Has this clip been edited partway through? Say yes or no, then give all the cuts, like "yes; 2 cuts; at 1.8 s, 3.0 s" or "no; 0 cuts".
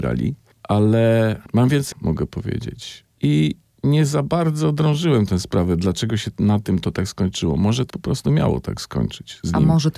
yes; 2 cuts; at 1.9 s, 7.9 s